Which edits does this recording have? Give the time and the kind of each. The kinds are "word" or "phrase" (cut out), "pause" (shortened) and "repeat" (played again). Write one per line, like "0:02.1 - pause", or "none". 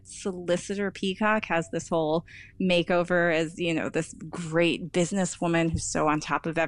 none